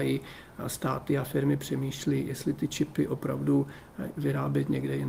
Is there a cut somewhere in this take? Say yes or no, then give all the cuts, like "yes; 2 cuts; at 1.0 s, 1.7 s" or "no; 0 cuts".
no; 0 cuts